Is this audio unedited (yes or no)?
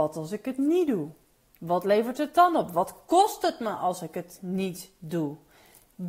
yes